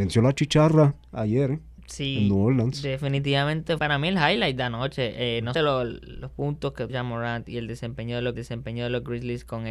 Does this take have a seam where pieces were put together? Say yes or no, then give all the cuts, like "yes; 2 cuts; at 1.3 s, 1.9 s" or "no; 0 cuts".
yes; 4 cuts; at 3.8 s, 5.5 s, 6.9 s, 8.4 s